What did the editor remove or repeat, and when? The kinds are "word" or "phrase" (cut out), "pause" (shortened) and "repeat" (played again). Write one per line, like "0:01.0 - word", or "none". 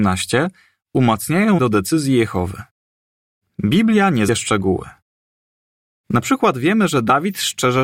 0:01.6 - phrase
0:02.8 - pause
0:04.3 - phrase